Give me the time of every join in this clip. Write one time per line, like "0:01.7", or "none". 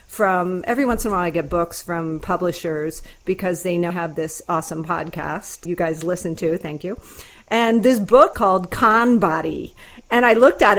0:03.9
0:05.7
0:08.3